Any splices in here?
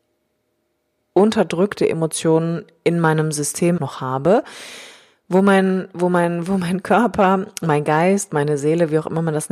yes; 1 cut; at 3.8 s

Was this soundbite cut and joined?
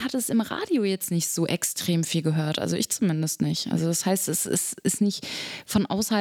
no; 0 cuts

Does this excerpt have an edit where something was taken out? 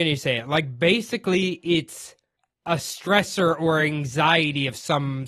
no; 0 cuts

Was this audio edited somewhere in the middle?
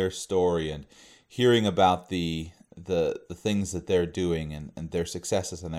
no; 0 cuts

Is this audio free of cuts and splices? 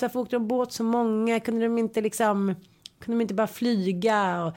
yes; 0 cuts

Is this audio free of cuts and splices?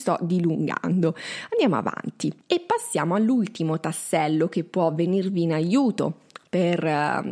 yes; 0 cuts

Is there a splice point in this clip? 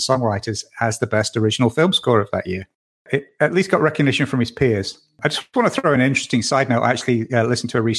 no; 0 cuts

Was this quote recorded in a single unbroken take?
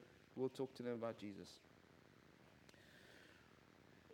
yes; 0 cuts

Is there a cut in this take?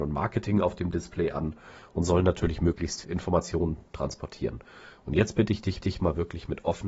yes; 2 cuts; at 3.0 s, 5.8 s

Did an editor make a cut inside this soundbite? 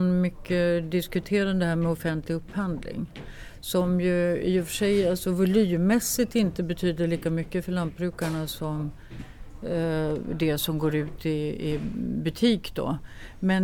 no; 0 cuts

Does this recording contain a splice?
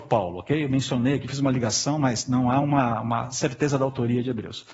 no; 0 cuts

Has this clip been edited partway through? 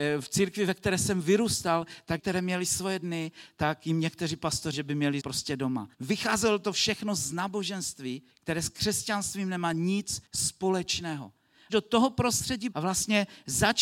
yes; 8 cuts; at 2.2 s, 4.7 s, 5.2 s, 5.9 s, 8.3 s, 10.2 s, 11.7 s, 12.7 s

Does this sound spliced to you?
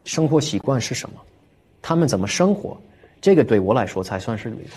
no; 0 cuts

